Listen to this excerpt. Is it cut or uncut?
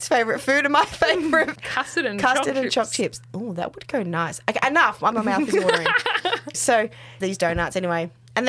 cut